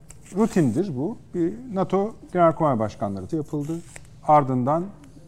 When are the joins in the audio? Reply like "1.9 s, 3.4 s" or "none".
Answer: 3.3 s